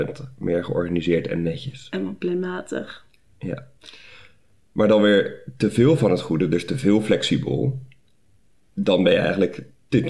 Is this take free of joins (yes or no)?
yes